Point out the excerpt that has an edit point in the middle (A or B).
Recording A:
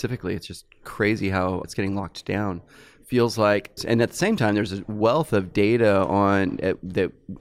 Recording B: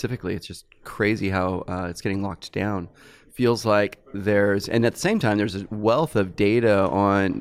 A